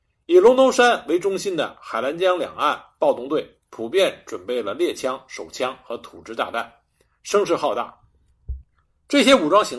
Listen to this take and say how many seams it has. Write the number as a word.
zero